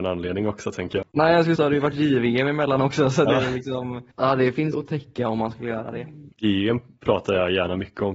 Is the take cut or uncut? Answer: cut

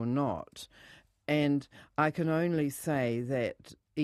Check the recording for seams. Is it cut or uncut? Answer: uncut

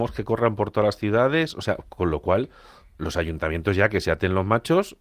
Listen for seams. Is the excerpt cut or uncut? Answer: uncut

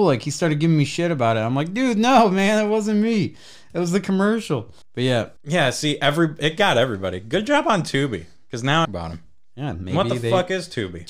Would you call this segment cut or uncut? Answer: cut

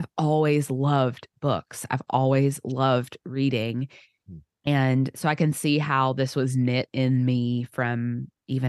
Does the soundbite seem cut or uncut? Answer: uncut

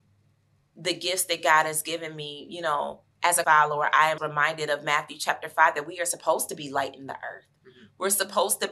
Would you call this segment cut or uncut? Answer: cut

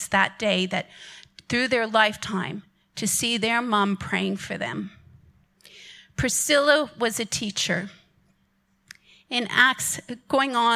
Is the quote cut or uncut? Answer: uncut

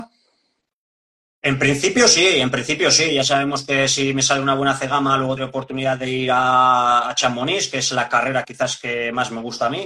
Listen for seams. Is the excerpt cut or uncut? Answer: cut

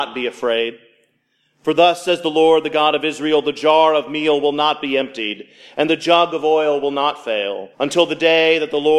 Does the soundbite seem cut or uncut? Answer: cut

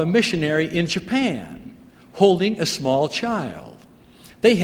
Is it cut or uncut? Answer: uncut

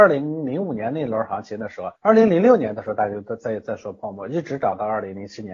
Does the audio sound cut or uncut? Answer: cut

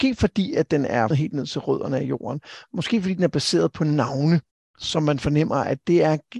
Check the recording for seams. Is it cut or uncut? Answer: cut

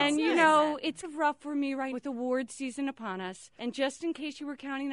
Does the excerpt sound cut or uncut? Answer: cut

